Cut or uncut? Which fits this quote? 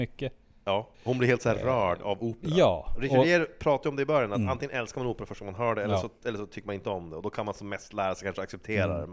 cut